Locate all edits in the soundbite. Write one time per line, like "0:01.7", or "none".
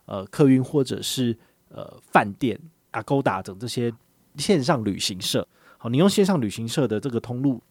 none